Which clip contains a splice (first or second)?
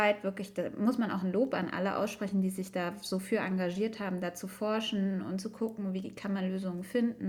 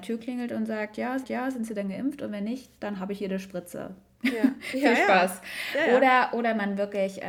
second